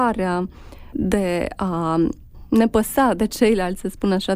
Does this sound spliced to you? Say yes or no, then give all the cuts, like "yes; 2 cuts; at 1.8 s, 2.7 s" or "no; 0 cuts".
no; 0 cuts